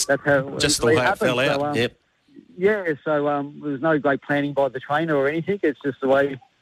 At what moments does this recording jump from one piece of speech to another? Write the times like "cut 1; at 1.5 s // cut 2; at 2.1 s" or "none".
cut 1; at 2.5 s